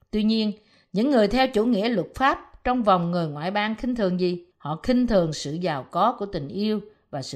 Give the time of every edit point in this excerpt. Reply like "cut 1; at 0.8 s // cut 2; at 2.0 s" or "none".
cut 1; at 4.5 s